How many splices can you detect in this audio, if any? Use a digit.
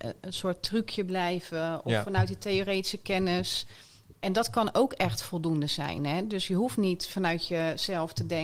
0